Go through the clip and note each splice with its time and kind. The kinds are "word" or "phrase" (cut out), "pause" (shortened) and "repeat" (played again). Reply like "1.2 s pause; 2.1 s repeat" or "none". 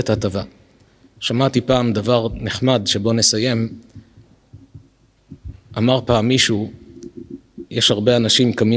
none